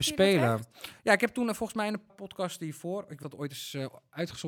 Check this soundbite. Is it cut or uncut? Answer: cut